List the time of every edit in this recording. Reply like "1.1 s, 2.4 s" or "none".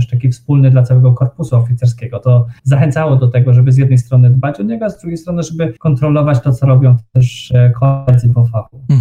2.6 s, 5.8 s